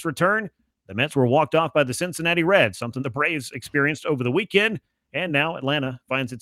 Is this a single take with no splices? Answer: yes; 0 cuts

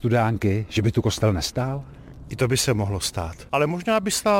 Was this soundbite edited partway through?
no; 0 cuts

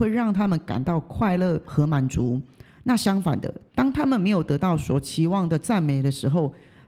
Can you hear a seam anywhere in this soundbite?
no; 0 cuts

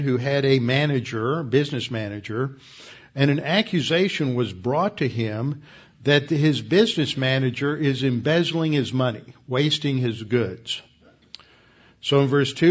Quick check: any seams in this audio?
no; 0 cuts

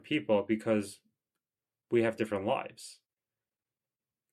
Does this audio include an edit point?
no; 0 cuts

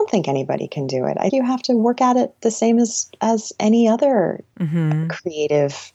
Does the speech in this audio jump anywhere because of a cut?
yes; 1 cut; at 1.3 s

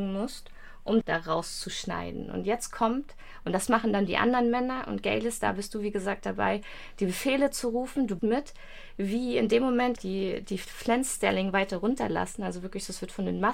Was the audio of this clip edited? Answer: yes; 3 cuts; at 1.0 s, 8.2 s, 10.0 s

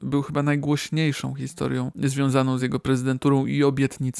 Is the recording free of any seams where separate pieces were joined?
yes; 0 cuts

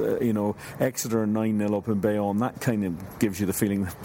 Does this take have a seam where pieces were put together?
no; 0 cuts

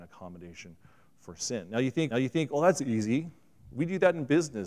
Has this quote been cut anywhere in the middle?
yes; 1 cut; at 2.1 s

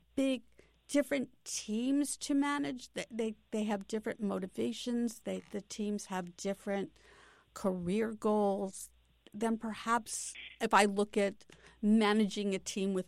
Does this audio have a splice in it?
no; 0 cuts

